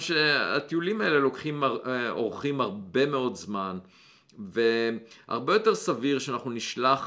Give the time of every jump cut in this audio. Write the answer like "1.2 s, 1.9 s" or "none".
none